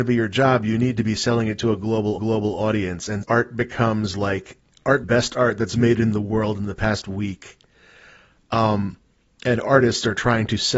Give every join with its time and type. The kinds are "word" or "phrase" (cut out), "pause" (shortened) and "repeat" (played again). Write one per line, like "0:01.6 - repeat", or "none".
0:02.2 - repeat
0:03.2 - word
0:05.0 - phrase